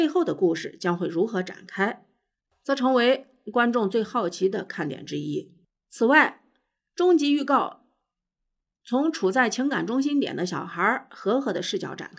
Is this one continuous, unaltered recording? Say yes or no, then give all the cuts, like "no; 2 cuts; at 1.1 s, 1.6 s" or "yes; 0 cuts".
yes; 0 cuts